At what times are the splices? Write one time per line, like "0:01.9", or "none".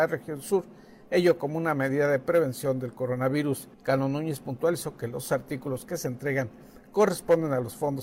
0:03.7